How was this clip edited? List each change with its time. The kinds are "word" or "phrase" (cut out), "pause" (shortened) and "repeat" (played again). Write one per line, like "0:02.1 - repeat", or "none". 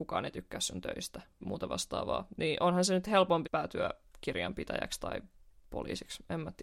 0:01.4 - word
0:03.4 - word